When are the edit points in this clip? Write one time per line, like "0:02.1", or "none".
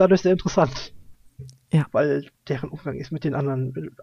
none